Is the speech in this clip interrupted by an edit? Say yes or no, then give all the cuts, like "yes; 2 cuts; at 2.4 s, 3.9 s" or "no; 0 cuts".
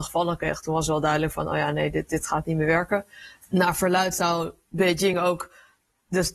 no; 0 cuts